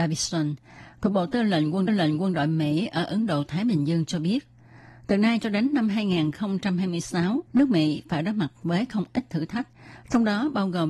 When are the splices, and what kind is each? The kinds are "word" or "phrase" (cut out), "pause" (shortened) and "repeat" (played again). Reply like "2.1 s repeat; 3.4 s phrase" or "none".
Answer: 1.9 s repeat; 7.5 s pause